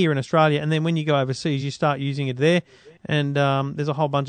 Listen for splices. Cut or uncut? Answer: uncut